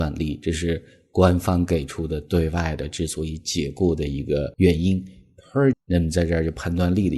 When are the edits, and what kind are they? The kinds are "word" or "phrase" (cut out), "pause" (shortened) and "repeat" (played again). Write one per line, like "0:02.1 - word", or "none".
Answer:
0:05.7 - word